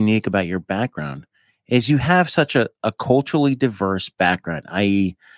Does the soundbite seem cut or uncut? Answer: uncut